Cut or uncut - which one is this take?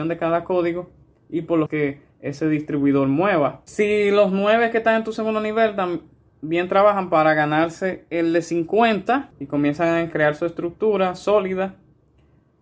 cut